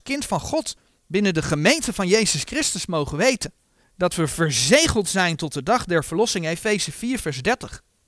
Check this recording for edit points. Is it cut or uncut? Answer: uncut